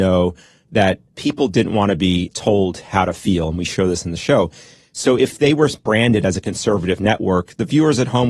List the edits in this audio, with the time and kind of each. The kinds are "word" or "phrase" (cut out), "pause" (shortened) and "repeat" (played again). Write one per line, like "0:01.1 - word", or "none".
none